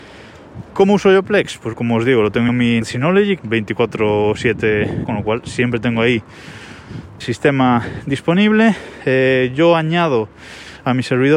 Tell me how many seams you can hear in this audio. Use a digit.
6